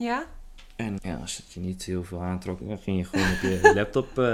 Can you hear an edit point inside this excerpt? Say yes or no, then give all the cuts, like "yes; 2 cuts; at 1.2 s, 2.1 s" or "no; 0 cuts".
yes; 2 cuts; at 1.0 s, 2.6 s